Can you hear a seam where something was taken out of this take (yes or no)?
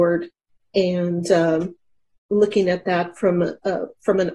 no